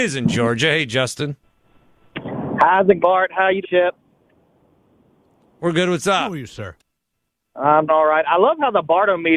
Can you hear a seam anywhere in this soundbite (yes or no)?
yes